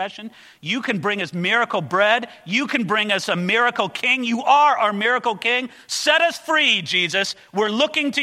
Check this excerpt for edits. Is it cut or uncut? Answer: uncut